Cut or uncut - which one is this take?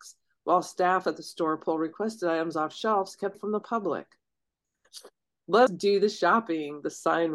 cut